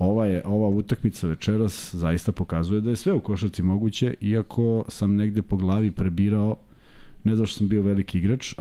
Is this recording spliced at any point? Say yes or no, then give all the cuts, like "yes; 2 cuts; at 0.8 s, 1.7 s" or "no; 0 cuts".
no; 0 cuts